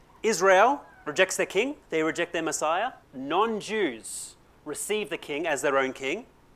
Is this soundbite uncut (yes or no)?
no